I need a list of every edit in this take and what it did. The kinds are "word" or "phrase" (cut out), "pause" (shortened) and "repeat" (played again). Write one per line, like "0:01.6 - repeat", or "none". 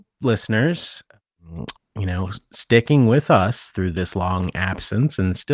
0:01.8 - word